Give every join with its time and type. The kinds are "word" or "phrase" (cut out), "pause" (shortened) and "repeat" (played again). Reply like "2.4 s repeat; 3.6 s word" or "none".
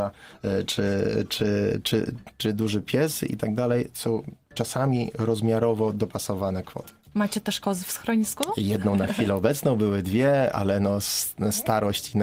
none